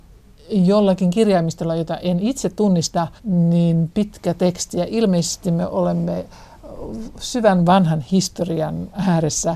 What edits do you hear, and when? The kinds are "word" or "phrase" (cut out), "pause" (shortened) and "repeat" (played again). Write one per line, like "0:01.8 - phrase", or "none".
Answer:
0:03.2 - pause